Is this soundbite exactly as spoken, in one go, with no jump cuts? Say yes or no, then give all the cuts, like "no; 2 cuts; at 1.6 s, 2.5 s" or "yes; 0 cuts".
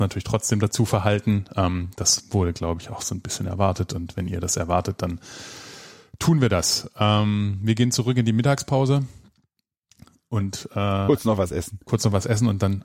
yes; 0 cuts